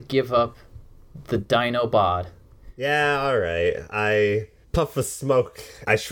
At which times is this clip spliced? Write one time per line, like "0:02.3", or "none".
none